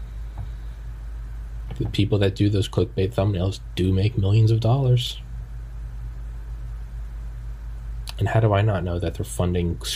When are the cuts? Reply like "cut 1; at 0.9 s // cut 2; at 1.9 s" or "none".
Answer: none